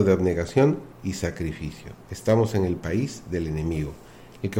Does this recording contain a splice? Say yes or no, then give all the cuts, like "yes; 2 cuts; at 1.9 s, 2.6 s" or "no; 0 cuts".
yes; 2 cuts; at 0.9 s, 2.0 s